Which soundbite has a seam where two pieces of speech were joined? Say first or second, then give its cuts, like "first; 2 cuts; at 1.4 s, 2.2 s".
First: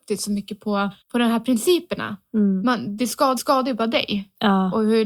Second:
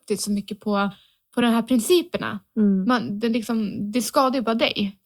first; 3 cuts; at 1.0 s, 3.0 s, 3.4 s